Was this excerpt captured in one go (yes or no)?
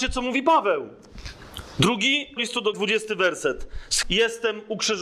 no